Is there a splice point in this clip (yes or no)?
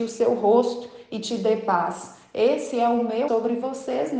yes